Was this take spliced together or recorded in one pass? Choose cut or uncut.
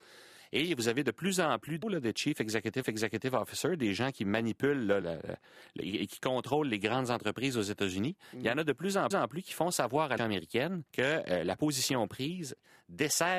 cut